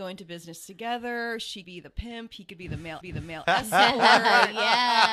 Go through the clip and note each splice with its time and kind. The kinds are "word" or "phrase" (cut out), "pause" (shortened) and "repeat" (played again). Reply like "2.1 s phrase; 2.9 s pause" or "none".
1.6 s word; 3.0 s repeat